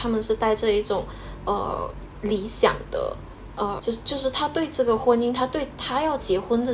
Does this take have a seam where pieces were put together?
yes; 1 cut; at 3.8 s

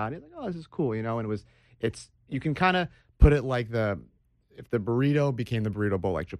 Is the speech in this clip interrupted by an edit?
no; 0 cuts

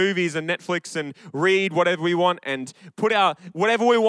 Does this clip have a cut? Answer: no; 0 cuts

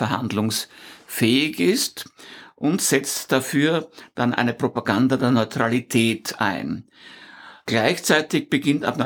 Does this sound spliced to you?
no; 0 cuts

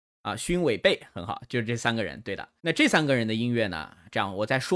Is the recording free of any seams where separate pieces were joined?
no; 1 cut; at 2.6 s

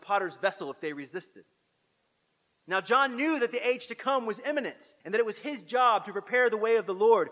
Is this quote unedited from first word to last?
no; 1 cut; at 5.0 s

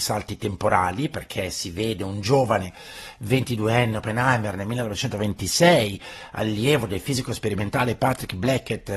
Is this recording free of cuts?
yes; 0 cuts

